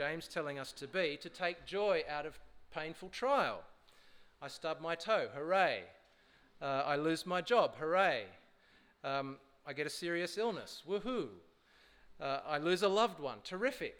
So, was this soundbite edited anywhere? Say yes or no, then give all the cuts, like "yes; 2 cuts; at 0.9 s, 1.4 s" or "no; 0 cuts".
no; 0 cuts